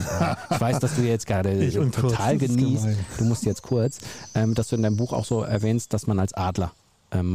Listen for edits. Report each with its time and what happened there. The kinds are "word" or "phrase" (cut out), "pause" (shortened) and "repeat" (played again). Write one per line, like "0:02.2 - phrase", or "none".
none